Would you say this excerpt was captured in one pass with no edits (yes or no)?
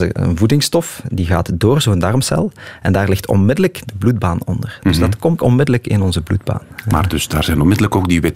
no